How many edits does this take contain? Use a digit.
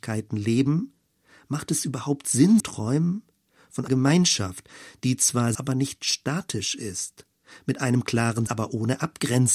4